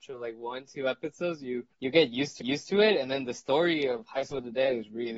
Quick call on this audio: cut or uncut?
cut